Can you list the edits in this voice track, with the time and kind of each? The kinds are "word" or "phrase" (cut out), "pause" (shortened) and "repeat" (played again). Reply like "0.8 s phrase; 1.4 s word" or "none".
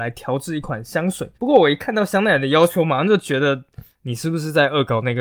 1.3 s pause